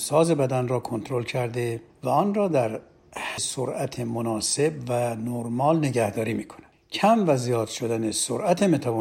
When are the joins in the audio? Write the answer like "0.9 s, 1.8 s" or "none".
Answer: 3.4 s